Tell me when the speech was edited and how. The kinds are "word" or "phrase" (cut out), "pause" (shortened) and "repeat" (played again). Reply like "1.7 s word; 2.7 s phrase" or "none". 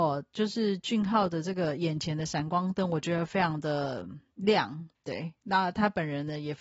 5.0 s pause